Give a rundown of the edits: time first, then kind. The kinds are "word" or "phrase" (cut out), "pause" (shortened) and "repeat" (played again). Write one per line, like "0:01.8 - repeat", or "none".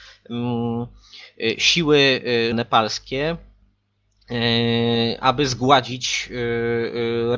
0:02.5 - word